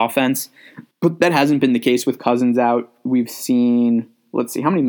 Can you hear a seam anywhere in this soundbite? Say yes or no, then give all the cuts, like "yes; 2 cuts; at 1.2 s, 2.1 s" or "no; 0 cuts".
yes; 1 cut; at 0.9 s